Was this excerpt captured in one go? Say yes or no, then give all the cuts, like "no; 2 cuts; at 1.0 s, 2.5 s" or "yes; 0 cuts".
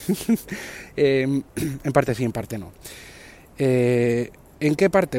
yes; 0 cuts